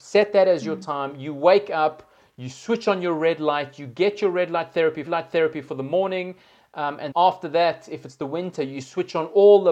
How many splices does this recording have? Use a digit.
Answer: 2